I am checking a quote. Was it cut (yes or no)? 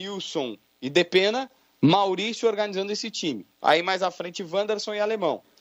yes